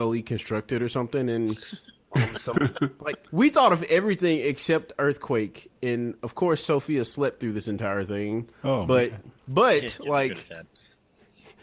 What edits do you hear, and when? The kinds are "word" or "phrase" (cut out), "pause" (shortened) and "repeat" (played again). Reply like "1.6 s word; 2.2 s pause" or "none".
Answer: 3.3 s pause; 9.4 s pause